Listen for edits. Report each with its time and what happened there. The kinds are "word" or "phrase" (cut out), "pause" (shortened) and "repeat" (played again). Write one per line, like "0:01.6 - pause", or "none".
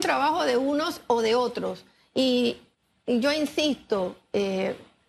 none